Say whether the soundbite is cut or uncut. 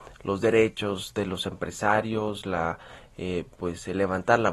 uncut